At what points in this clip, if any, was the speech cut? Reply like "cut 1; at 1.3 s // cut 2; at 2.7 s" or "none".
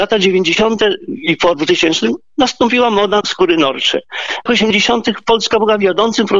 cut 1; at 1.5 s // cut 2; at 3.2 s // cut 3; at 4.5 s